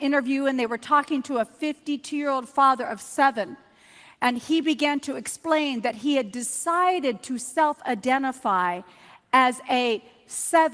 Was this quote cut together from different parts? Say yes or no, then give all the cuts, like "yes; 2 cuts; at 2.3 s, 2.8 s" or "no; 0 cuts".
no; 0 cuts